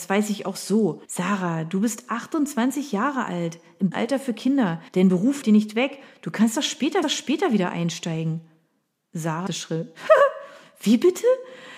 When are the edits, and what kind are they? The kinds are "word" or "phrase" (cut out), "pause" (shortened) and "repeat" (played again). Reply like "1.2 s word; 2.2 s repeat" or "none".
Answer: 1.0 s pause; 3.9 s word; 4.9 s pause; 5.4 s word; 7.0 s repeat; 9.5 s word